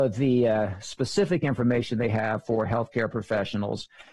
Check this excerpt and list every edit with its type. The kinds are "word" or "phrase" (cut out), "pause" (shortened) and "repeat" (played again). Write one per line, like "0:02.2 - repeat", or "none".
none